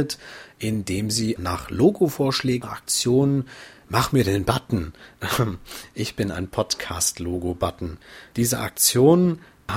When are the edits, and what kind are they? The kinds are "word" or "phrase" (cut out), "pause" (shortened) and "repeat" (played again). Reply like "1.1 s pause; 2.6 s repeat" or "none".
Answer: 1.4 s word; 2.6 s phrase

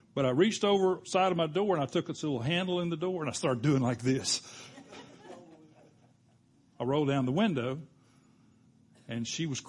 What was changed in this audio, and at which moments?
none

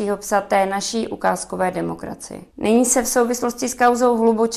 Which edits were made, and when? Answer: none

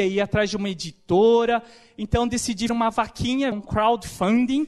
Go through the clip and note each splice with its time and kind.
2.7 s word; 3.5 s word

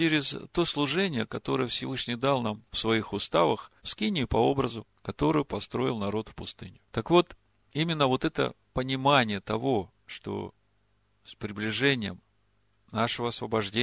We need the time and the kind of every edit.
3.8 s pause; 6.8 s pause; 10.0 s pause

